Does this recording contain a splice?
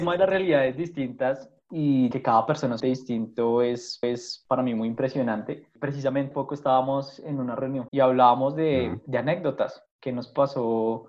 yes; 5 cuts; at 2.1 s, 2.8 s, 4.0 s, 6.3 s, 7.9 s

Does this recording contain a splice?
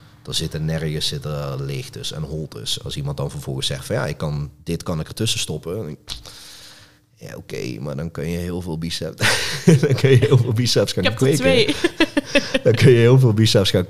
no; 0 cuts

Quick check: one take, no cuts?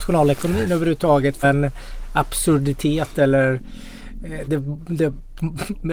no; 2 cuts; at 1.4 s, 4.4 s

